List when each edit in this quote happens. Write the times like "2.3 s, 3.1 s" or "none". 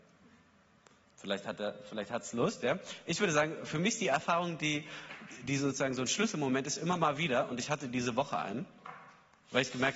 none